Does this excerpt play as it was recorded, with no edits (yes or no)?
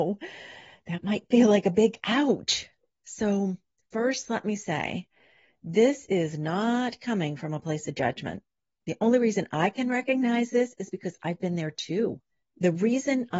yes